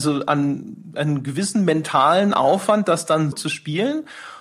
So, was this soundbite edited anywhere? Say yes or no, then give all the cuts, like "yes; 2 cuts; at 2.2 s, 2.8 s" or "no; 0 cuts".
yes; 1 cut; at 3.3 s